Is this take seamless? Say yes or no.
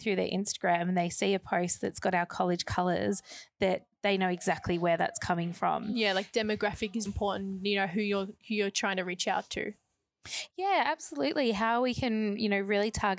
no